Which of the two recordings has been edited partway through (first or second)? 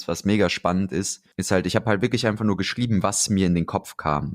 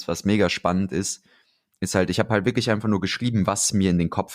first